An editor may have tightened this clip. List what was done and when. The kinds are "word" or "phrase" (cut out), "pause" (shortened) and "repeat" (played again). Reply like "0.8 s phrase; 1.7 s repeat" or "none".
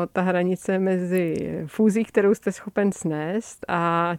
none